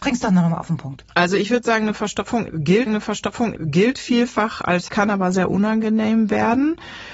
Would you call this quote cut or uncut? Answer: cut